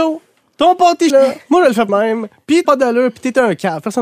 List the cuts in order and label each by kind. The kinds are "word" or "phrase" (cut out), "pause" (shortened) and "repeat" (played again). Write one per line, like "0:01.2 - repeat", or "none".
0:01.1 - word
0:01.9 - word
0:02.6 - word

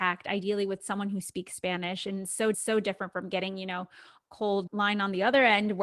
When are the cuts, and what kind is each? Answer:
0:02.5 - repeat
0:04.7 - word

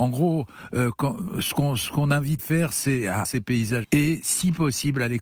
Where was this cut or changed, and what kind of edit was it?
0:02.4 - word
0:03.2 - word
0:03.8 - word

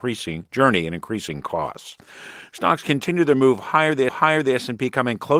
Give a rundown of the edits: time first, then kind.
0:04.1 - repeat

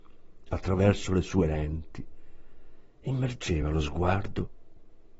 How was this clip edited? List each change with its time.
none

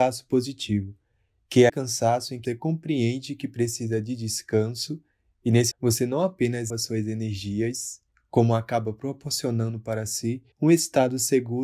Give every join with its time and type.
0:01.7 - word
0:02.5 - word
0:05.7 - word
0:06.7 - word
0:08.1 - pause
0:10.5 - pause

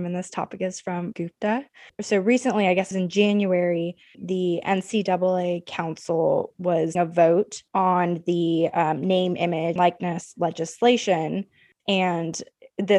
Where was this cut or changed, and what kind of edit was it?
0:01.1 - word
0:02.9 - word
0:04.1 - word
0:07.0 - word
0:07.7 - pause
0:09.8 - word

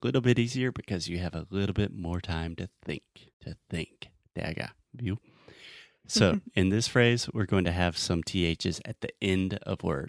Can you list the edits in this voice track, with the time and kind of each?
0:03.3 - pause

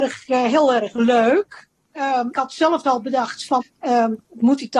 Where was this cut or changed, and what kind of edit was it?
0:02.3 - word
0:02.8 - word
0:03.6 - word

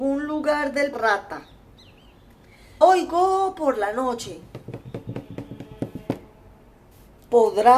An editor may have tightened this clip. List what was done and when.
0:00.9 - phrase
0:02.8 - word

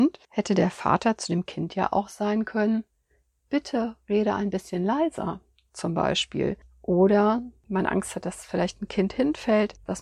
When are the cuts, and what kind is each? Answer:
none

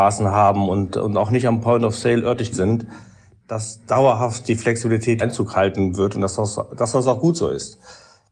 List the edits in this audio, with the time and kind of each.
0:02.5 - word
0:05.2 - word

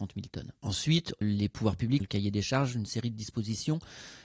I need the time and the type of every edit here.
0:01.2 - word
0:02.0 - phrase

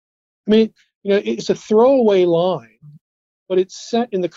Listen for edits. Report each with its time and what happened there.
none

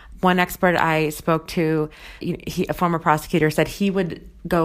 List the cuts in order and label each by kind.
0:02.2 - word

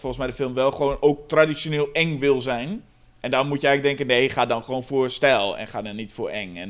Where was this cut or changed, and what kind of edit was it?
0:02.9 - pause

